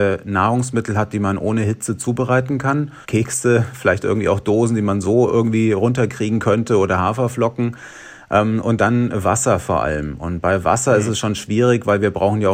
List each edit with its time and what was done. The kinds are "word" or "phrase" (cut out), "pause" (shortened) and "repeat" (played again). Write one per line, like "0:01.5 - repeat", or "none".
0:03.0 - pause